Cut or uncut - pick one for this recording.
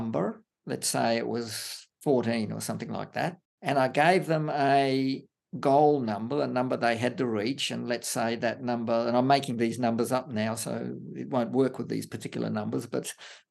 uncut